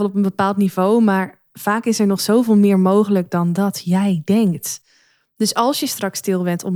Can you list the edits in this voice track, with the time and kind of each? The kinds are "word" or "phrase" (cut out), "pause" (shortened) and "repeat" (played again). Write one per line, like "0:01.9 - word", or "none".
none

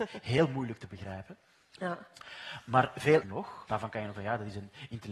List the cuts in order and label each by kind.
0:03.2 - word
0:03.7 - word
0:04.1 - word

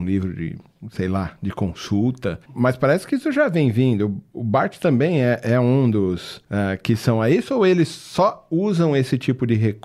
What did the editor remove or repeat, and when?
0:02.4 - pause

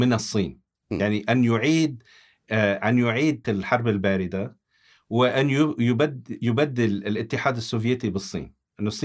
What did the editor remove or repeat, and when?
0:03.4 - word

